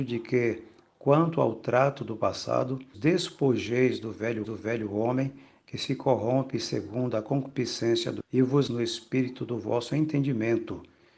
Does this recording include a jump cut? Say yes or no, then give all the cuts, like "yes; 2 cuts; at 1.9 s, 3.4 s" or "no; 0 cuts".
yes; 4 cuts; at 2.9 s, 4.4 s, 8.2 s, 8.7 s